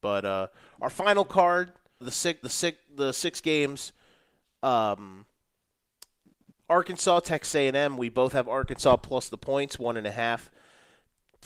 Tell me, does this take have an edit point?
yes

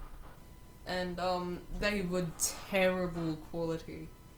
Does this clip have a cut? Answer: no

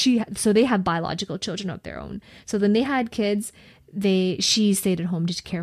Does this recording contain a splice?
no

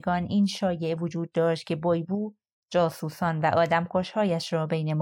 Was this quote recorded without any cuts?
yes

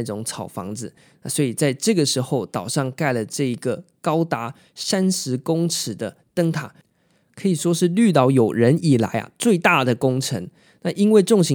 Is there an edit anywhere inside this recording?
no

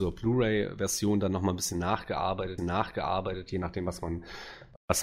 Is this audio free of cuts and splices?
no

